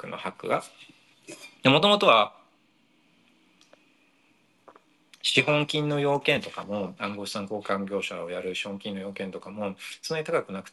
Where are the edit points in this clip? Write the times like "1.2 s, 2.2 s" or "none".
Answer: 1.6 s